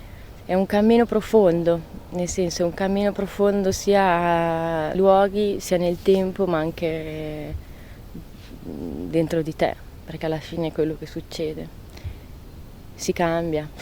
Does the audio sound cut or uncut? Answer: cut